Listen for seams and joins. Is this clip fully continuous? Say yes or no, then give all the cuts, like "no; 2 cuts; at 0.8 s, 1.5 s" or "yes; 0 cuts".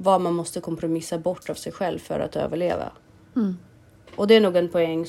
yes; 0 cuts